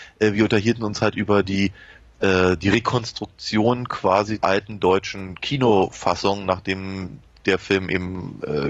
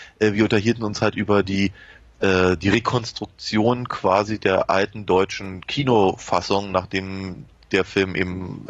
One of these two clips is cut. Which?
first; 1 cut; at 4.4 s

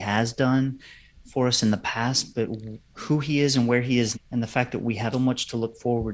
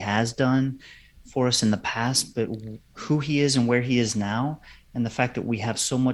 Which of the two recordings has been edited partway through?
first; 2 cuts; at 4.1 s, 5.1 s

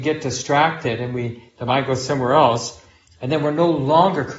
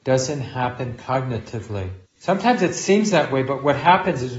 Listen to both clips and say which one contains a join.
second; 1 cut; at 2.1 s

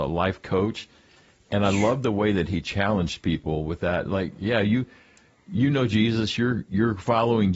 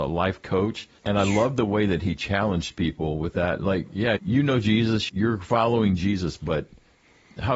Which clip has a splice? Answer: second; 3 cuts; at 1.0 s, 4.2 s, 5.1 s

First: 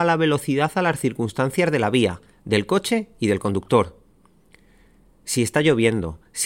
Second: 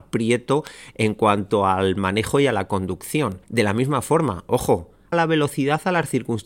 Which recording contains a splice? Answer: second; 2 cuts; at 3.4 s, 5.1 s

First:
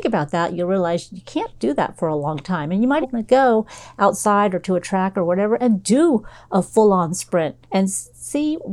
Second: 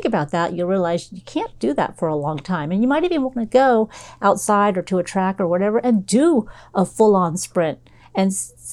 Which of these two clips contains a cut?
first; 2 cuts; at 3.0 s, 7.6 s

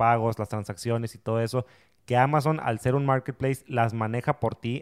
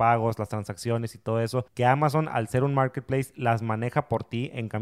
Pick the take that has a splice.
second; 1 cut; at 1.7 s

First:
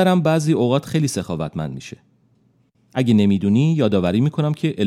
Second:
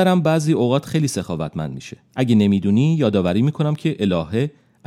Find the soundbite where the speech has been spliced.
second; 1 cut; at 2.1 s

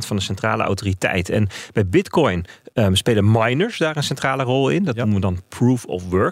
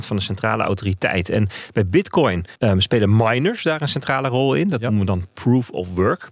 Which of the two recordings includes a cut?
second; 1 cut; at 2.6 s

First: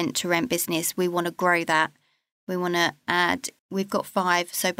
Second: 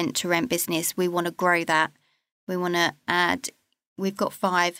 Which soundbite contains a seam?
first; 1 cut; at 3.6 s

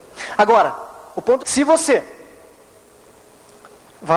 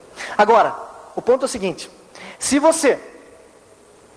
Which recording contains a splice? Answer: first; 1 cut; at 1.4 s

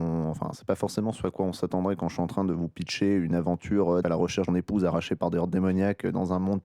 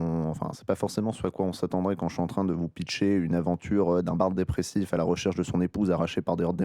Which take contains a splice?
first; 2 cuts; at 4.0 s, 4.5 s

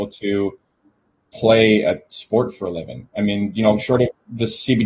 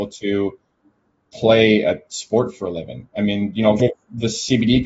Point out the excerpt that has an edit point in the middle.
second; 1 cut; at 3.8 s

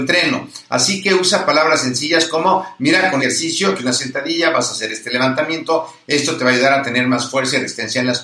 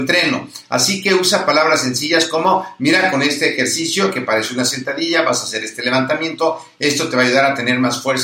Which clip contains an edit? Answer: first; 2 cuts; at 3.2 s, 3.8 s

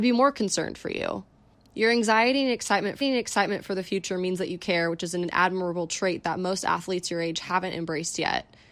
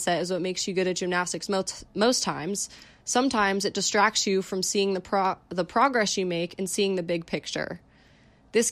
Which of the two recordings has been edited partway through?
first; 2 cuts; at 1.5 s, 3.0 s

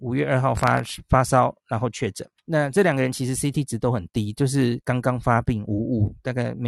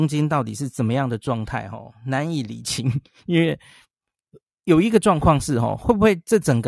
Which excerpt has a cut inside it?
first; 1 cut; at 2.4 s

